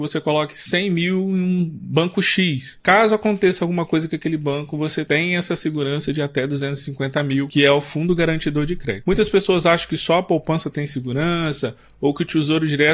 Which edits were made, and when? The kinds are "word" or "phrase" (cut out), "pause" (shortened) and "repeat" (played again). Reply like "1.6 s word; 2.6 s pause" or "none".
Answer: none